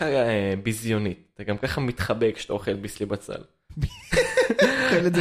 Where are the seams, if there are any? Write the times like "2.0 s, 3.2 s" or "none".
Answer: none

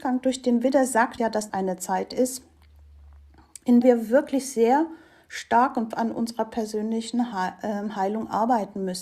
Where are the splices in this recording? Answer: 1.2 s, 1.5 s, 3.8 s, 5.9 s

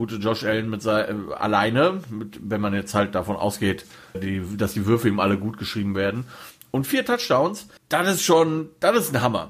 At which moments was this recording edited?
4.1 s, 7.8 s

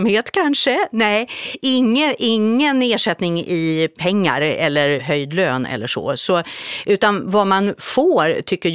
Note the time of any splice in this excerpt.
none

